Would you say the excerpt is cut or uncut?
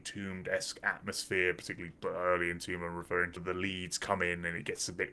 cut